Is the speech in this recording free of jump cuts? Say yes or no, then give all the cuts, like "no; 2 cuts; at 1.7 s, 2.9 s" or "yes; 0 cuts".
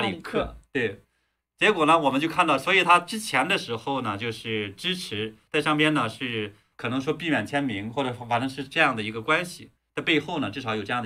no; 1 cut; at 6.7 s